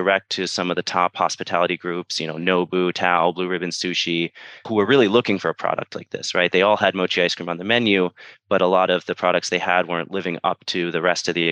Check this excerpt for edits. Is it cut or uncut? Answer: uncut